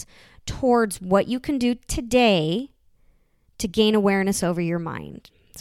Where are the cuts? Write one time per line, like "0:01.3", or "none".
none